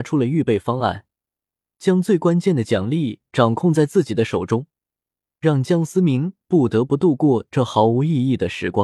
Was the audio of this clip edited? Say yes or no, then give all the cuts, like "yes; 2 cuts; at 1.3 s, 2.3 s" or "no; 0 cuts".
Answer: no; 0 cuts